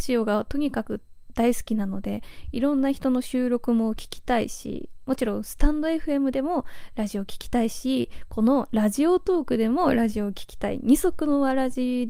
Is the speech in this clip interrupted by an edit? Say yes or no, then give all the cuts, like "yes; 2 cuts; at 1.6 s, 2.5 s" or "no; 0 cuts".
no; 0 cuts